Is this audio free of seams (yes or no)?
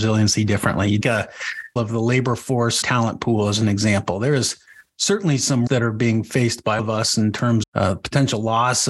no